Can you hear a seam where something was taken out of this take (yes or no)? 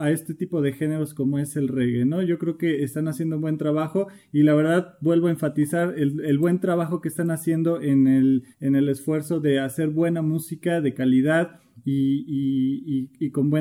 yes